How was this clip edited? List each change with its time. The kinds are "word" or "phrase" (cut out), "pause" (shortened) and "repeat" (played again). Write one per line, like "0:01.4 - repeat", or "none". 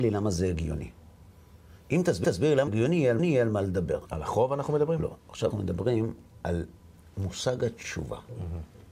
0:02.2 - repeat
0:02.7 - word
0:03.2 - repeat
0:04.1 - word
0:05.5 - word